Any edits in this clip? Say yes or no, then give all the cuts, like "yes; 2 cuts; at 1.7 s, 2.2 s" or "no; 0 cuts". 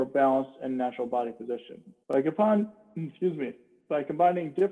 yes; 1 cut; at 2.0 s